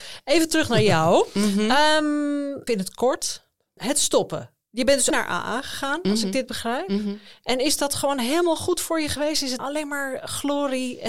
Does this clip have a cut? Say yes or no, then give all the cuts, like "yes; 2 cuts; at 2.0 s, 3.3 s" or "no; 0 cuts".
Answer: yes; 3 cuts; at 2.7 s, 5.1 s, 9.6 s